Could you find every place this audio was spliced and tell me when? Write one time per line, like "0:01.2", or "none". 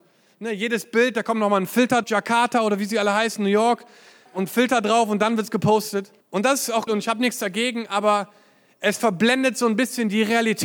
0:02.0
0:04.3
0:06.2
0:06.9